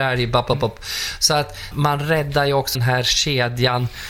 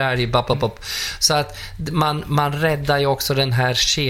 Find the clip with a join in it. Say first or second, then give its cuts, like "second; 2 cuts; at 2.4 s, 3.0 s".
first; 2 cuts; at 1.7 s, 2.7 s